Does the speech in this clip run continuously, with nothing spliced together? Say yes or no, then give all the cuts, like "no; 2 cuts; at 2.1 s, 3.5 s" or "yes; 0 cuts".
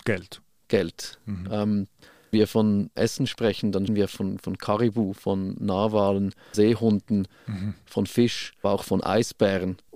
no; 5 cuts; at 2.3 s, 3.0 s, 3.9 s, 6.5 s, 8.6 s